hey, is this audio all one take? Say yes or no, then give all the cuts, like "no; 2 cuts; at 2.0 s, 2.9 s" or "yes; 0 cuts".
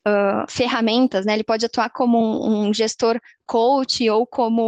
yes; 0 cuts